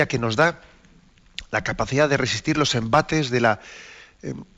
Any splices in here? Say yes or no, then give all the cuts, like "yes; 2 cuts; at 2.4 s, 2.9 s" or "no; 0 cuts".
no; 0 cuts